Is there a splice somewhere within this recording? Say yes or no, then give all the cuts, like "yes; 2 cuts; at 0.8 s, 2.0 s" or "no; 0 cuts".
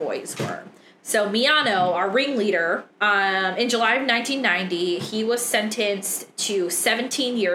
yes; 1 cut; at 2.9 s